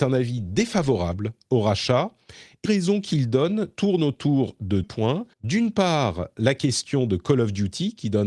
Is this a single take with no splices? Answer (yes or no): no